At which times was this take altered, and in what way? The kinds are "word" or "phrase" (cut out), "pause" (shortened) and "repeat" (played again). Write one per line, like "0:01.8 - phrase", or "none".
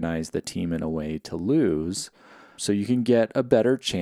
0:02.6 - word